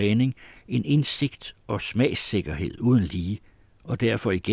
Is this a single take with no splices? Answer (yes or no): yes